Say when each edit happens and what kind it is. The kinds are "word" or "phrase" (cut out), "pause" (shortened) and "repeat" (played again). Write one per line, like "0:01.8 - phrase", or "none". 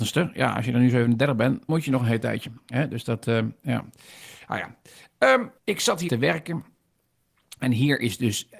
0:01.7 - word
0:05.6 - pause
0:06.1 - word